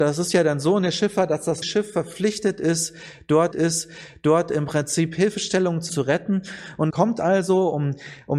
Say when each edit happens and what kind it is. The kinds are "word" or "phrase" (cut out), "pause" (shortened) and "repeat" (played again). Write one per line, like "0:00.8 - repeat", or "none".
0:01.6 - word
0:03.5 - repeat
0:05.9 - phrase
0:06.9 - phrase